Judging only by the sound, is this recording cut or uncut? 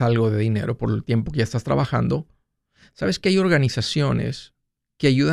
uncut